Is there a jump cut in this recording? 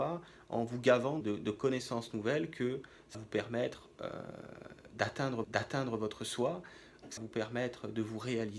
yes; 4 cuts; at 1.2 s, 3.1 s, 5.4 s, 7.2 s

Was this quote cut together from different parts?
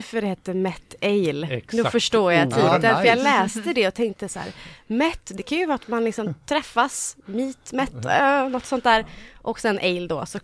no; 0 cuts

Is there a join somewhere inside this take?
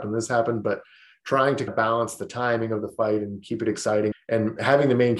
yes; 2 cuts; at 1.7 s, 4.1 s

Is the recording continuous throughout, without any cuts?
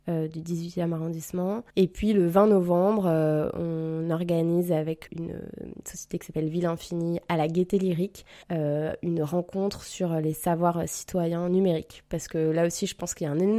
no; 3 cuts; at 1.7 s, 5.1 s, 8.4 s

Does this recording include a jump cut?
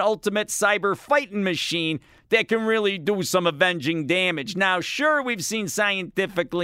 no; 0 cuts

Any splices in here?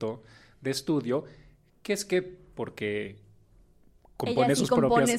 no; 0 cuts

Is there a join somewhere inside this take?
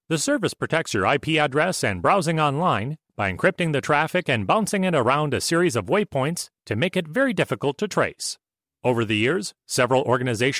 yes; 1 cut; at 8.7 s

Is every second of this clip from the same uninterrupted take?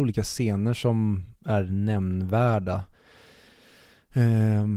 yes; 0 cuts

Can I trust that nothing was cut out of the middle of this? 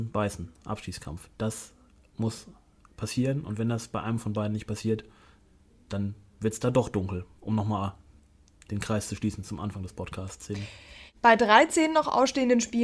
yes; 0 cuts

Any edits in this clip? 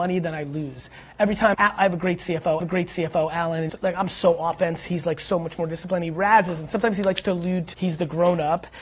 yes; 4 cuts; at 1.5 s, 2.6 s, 3.7 s, 7.7 s

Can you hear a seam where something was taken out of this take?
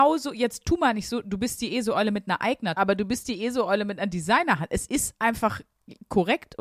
yes; 1 cut; at 2.8 s

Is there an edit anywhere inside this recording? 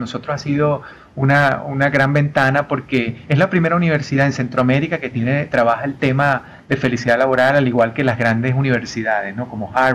no; 0 cuts

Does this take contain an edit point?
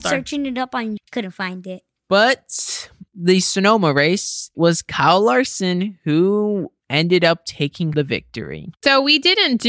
yes; 5 cuts; at 1.0 s, 3.1 s, 4.5 s, 6.8 s, 7.9 s

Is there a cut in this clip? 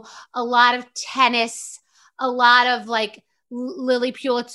no; 0 cuts

